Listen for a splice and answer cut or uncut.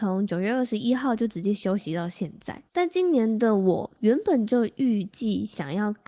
cut